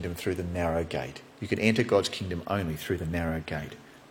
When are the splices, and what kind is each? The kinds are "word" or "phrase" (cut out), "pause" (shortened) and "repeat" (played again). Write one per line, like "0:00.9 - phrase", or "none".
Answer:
0:01.3 - pause